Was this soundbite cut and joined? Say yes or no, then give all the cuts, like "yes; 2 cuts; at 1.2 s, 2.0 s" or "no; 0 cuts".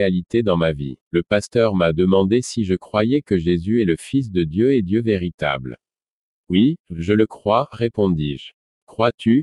yes; 1 cut; at 1.0 s